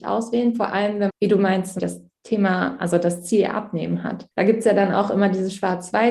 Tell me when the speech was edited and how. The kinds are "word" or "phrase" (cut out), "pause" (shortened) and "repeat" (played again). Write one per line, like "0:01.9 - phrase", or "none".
0:01.1 - phrase
0:01.8 - word
0:04.3 - pause